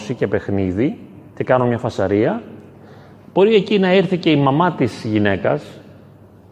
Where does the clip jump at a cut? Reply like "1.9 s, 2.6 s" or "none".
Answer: none

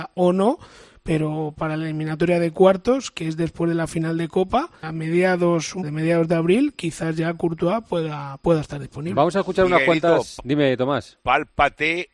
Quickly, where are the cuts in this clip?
4.8 s, 5.8 s, 11.2 s

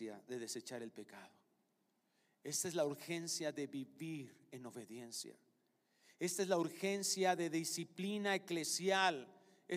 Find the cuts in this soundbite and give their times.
none

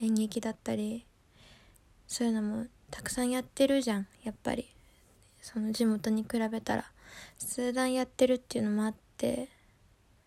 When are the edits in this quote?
none

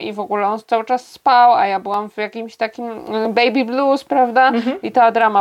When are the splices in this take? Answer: none

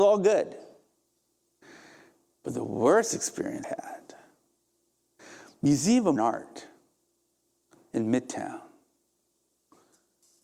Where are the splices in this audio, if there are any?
3.6 s, 6.2 s

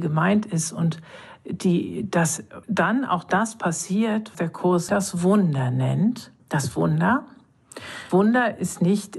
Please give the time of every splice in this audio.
2.6 s, 4.3 s, 4.9 s, 6.4 s, 8.1 s

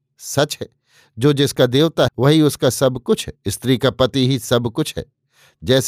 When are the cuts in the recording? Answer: 2.1 s, 3.4 s

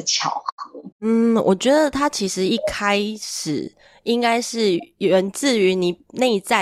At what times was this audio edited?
0.9 s

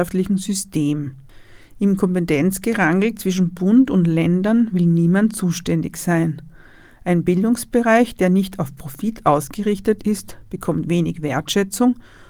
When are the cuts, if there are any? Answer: none

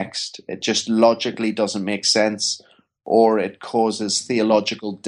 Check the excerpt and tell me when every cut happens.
none

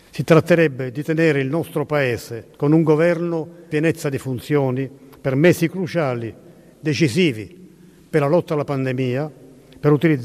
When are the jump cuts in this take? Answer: 2.5 s, 3.7 s

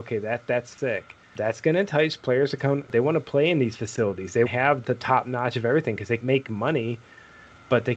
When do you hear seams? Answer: 4.5 s, 4.8 s, 6.2 s

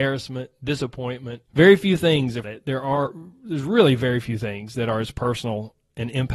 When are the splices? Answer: 1.5 s, 2.4 s

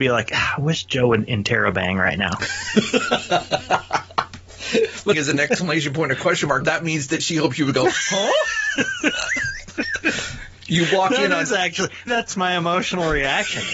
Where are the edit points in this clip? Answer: 5.1 s, 6.6 s, 12.1 s

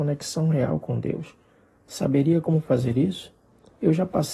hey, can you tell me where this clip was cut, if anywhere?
none

